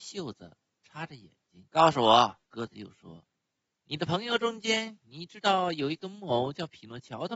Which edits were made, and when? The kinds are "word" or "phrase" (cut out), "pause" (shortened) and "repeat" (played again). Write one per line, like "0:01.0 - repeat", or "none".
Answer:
0:01.7 - pause
0:02.4 - pause